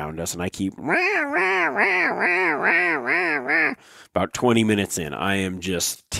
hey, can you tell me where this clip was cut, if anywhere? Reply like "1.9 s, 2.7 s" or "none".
none